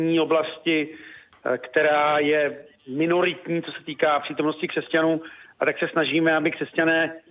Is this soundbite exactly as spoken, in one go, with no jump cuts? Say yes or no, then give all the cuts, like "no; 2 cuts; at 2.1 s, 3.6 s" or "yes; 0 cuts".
yes; 0 cuts